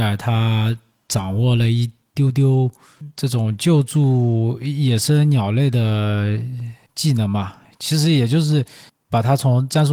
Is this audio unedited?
yes; 0 cuts

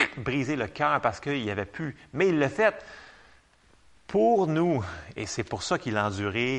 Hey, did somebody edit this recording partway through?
no; 0 cuts

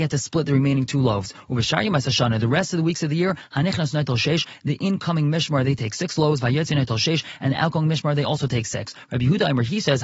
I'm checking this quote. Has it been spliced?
no; 0 cuts

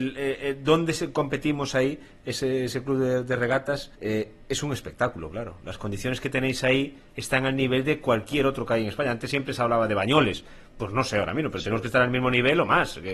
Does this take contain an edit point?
yes; 1 cut; at 4.0 s

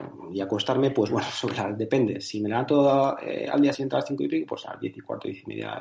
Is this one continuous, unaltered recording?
yes; 0 cuts

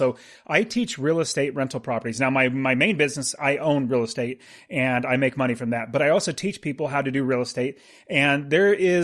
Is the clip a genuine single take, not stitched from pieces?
yes; 0 cuts

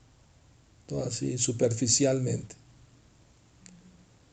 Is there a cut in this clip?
no; 0 cuts

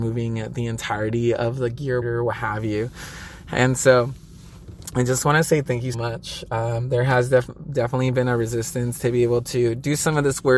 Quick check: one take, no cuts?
no; 2 cuts; at 2.0 s, 5.9 s

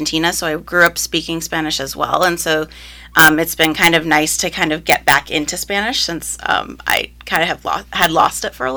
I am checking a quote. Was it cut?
no; 0 cuts

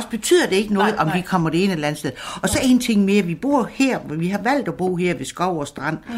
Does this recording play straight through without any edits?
yes; 0 cuts

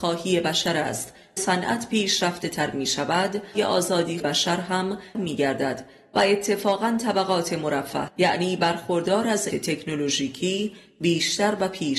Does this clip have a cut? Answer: yes; 6 cuts; at 1.4 s, 3.5 s, 4.2 s, 5.1 s, 8.1 s, 9.5 s

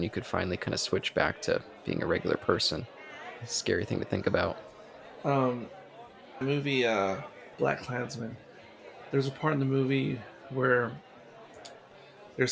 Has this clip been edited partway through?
yes; 1 cut; at 6.4 s

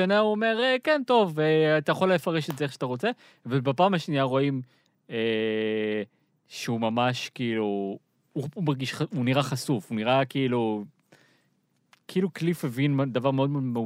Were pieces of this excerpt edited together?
no; 0 cuts

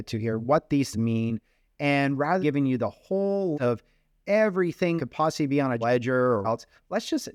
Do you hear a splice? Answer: yes; 6 cuts; at 0.9 s, 2.4 s, 3.5 s, 5.0 s, 5.8 s, 6.4 s

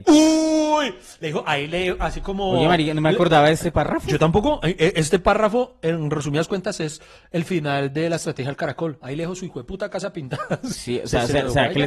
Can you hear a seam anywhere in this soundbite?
no; 0 cuts

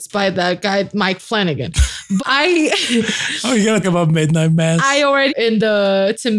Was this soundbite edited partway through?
yes; 3 cuts; at 2.2 s, 3.8 s, 5.3 s

